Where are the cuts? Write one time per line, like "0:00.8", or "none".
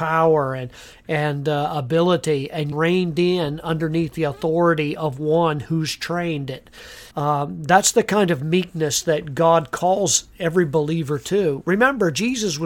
0:02.7
0:07.1